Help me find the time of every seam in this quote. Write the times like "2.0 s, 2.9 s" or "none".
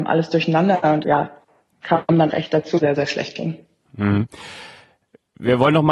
1.0 s, 2.3 s, 2.8 s